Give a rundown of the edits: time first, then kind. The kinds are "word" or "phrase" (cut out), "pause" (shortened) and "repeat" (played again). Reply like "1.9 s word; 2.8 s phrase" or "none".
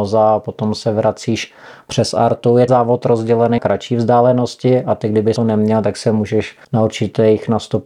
2.7 s word; 3.6 s word; 5.4 s phrase; 6.6 s pause